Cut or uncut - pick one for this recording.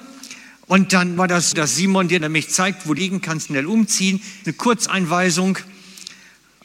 cut